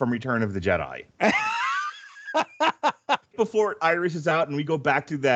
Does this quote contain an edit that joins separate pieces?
yes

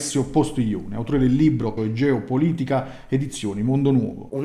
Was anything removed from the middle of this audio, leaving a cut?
yes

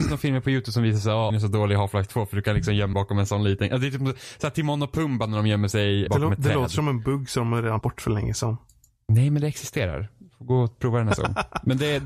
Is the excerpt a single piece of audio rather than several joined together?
no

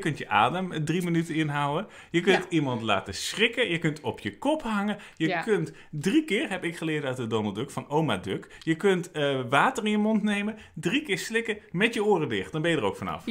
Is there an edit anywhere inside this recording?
no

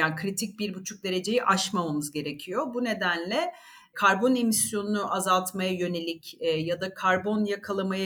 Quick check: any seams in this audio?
no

